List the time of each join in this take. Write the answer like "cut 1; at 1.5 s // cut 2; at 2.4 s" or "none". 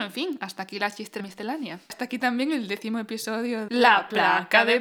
cut 1; at 1.2 s // cut 2; at 3.7 s